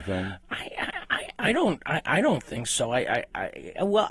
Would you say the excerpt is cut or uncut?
uncut